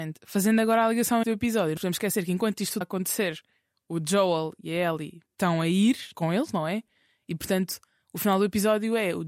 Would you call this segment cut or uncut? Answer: cut